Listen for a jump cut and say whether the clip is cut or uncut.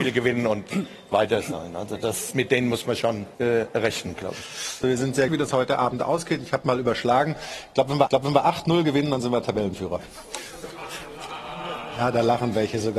cut